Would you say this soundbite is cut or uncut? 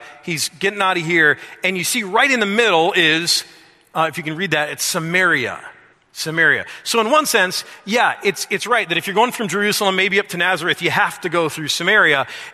cut